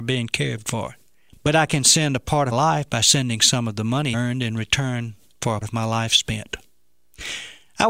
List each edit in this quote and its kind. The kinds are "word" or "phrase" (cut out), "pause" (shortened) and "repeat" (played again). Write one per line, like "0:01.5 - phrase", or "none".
0:02.5 - word
0:04.1 - word
0:05.6 - word